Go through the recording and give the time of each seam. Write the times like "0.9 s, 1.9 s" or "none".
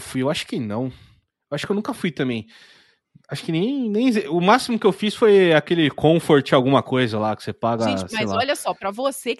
none